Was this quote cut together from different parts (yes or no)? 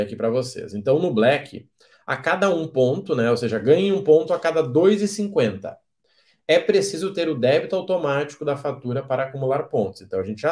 no